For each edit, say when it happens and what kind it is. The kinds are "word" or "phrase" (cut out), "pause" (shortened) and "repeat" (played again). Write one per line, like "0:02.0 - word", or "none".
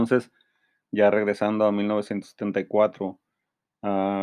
none

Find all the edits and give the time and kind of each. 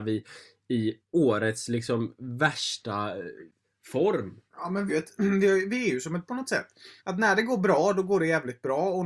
0:01.0 - pause
0:04.5 - pause
0:04.9 - word
0:06.3 - word
0:07.0 - pause

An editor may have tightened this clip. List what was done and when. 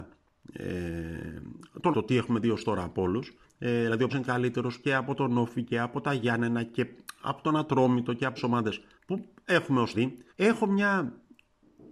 0:01.9 - phrase
0:03.4 - pause
0:04.1 - word
0:08.4 - word
0:08.9 - pause
0:09.9 - word
0:10.3 - pause

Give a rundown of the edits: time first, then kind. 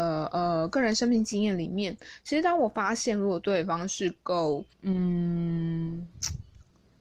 0:04.7 - pause

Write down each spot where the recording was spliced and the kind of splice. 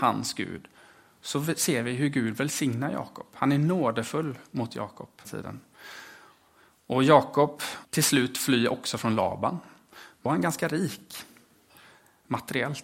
0:05.2 - word
0:07.8 - word
0:10.3 - word

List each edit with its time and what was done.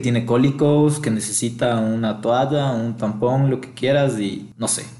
none

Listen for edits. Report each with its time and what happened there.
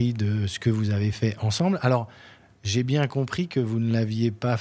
none

